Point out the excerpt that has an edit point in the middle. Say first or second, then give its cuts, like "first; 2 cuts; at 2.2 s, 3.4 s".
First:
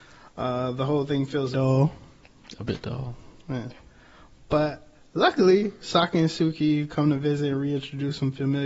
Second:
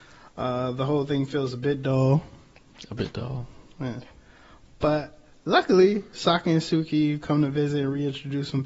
first; 1 cut; at 1.5 s